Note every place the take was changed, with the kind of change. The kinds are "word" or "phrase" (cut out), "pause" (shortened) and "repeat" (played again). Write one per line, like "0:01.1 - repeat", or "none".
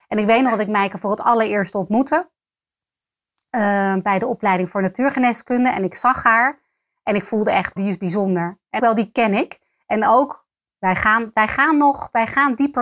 0:07.8 - word
0:08.8 - word